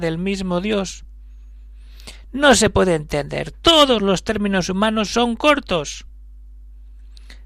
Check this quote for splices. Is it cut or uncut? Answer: uncut